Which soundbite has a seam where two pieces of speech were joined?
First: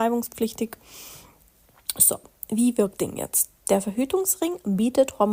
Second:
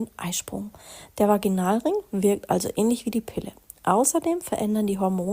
first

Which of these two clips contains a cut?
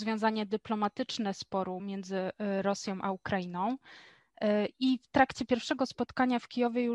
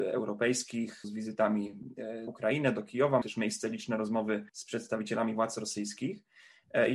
second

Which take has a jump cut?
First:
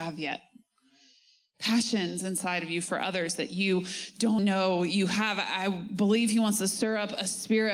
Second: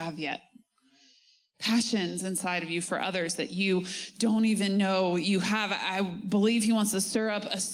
first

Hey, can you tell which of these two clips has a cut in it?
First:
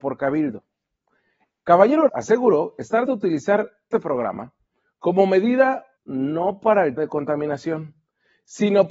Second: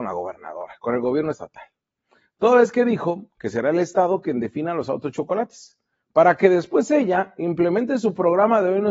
first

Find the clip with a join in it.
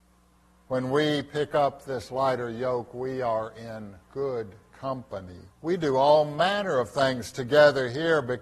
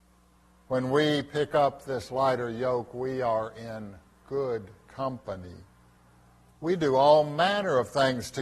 first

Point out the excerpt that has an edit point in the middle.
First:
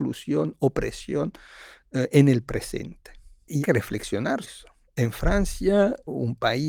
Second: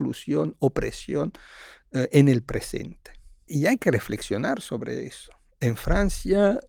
first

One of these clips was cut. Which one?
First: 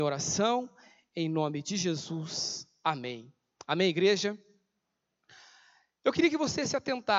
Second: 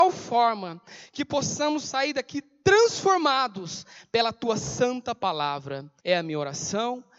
second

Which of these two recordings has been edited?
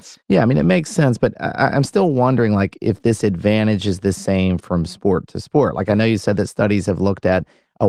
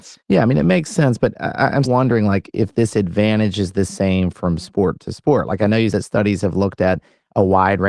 second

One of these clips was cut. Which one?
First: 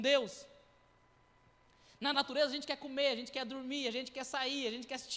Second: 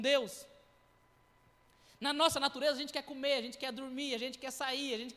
first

